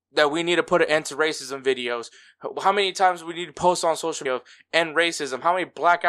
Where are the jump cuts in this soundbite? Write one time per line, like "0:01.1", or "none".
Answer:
0:04.3